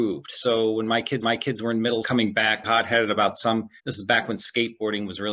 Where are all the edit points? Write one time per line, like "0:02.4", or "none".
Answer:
0:01.2
0:02.0
0:02.6
0:03.8